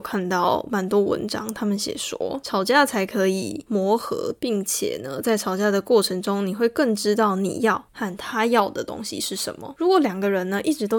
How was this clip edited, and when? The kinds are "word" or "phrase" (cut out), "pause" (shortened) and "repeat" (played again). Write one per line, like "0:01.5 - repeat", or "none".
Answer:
0:07.9 - pause